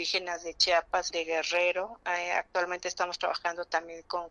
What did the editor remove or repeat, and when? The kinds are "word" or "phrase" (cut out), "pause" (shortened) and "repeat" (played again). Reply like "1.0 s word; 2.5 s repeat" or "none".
1.1 s word